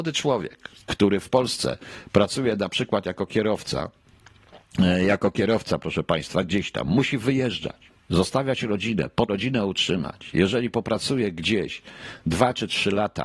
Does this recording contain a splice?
yes; 1 cut; at 9.3 s

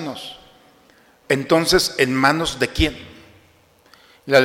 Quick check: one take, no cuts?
yes; 0 cuts

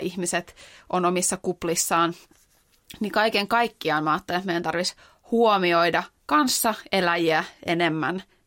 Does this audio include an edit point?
no; 0 cuts

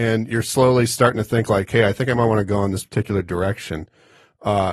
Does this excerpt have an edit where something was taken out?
no; 0 cuts

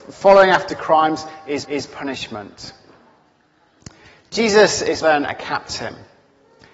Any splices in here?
yes; 2 cuts; at 1.6 s, 5.0 s

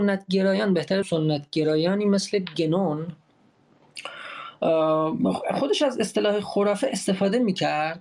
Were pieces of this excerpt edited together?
yes; 1 cut; at 1.0 s

